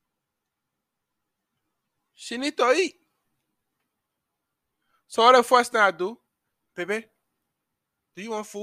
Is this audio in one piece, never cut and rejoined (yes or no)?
yes